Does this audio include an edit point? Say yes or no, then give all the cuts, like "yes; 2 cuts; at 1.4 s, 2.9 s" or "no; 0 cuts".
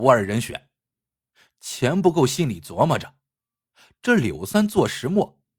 no; 0 cuts